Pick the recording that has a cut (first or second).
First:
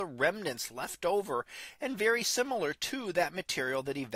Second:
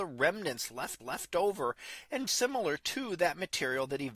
second